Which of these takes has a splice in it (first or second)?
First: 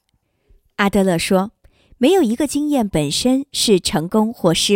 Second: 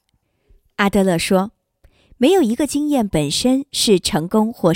first